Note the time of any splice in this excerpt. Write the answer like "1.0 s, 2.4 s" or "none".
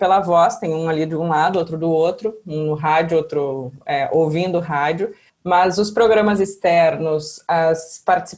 5.3 s